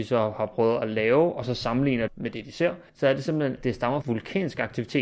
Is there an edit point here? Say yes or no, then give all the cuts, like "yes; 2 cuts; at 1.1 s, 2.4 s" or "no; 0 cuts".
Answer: yes; 4 cuts; at 2.1 s, 2.9 s, 3.6 s, 4.0 s